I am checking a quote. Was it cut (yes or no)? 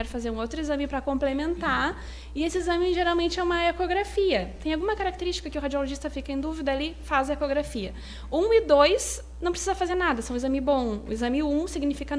no